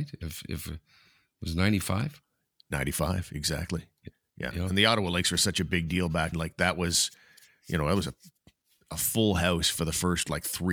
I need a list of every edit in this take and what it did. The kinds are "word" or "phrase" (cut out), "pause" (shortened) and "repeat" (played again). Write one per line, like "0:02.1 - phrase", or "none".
0:06.3 - word